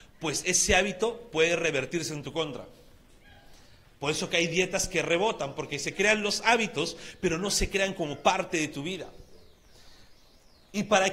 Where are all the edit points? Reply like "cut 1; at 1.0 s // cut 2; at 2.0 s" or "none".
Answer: none